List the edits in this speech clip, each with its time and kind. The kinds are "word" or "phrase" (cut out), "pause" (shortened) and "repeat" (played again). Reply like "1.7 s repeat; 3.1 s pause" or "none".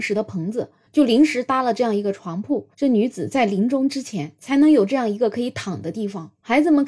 2.7 s pause